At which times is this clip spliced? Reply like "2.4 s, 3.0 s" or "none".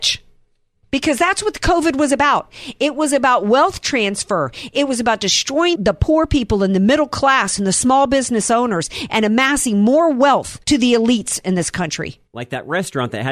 5.7 s, 10.6 s, 12.3 s